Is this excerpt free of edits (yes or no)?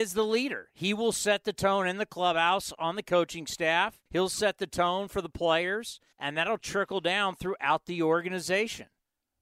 no